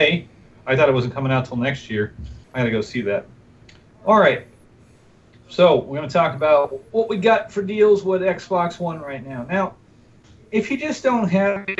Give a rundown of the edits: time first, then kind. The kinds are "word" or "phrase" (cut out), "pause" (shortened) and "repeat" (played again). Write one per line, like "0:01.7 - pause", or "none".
0:02.4 - pause

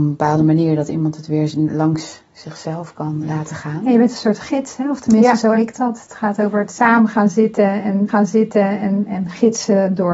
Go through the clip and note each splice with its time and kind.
0:03.2 - word
0:05.5 - word
0:08.1 - repeat

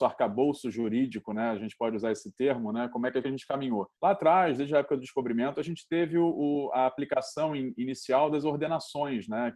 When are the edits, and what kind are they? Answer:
0:03.2 - phrase
0:03.9 - pause

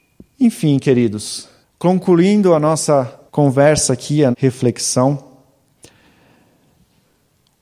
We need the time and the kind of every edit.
0:01.6 - pause
0:03.3 - pause
0:04.3 - word

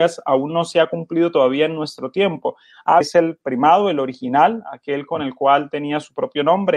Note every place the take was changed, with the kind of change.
0:03.0 - phrase

